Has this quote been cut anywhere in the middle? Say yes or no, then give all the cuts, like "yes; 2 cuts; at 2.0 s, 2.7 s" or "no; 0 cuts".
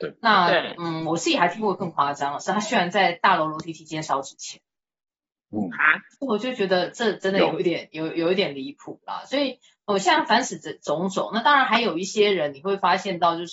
no; 0 cuts